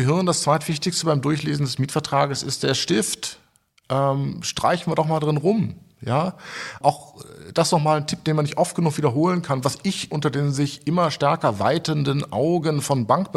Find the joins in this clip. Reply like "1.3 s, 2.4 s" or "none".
6.8 s, 10.1 s